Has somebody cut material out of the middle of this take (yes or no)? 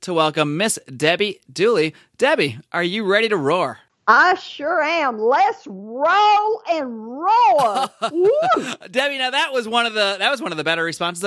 no